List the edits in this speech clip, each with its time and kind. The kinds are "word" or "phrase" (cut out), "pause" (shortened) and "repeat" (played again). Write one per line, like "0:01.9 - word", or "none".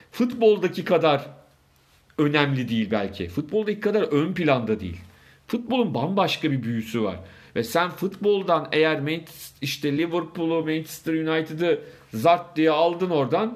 none